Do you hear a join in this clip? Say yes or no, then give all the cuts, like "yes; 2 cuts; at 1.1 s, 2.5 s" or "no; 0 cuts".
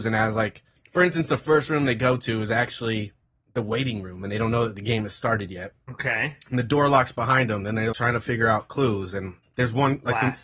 yes; 1 cut; at 7.9 s